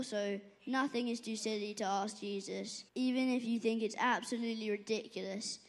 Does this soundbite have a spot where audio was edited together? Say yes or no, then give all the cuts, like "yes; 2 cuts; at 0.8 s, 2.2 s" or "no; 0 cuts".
yes; 1 cut; at 2.9 s